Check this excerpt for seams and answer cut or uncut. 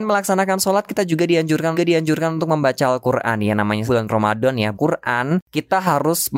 cut